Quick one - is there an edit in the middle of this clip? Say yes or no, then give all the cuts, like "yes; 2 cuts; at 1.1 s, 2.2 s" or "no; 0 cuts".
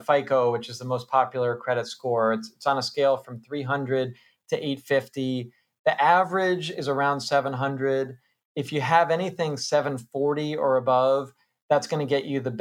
no; 0 cuts